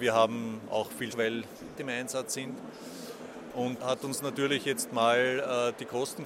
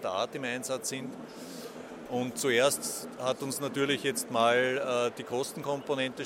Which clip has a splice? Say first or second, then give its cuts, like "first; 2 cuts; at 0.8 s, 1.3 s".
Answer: first; 3 cuts; at 1.1 s, 1.7 s, 3.8 s